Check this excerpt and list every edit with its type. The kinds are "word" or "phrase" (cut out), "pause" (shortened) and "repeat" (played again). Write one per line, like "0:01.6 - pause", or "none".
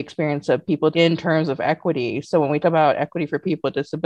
0:00.9 - word
0:02.6 - word

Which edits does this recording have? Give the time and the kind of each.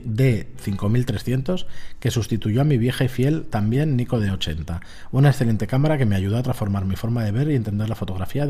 none

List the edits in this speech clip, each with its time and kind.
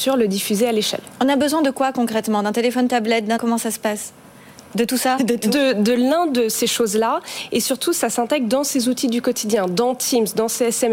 0:02.9 - phrase
0:03.4 - word
0:05.2 - word

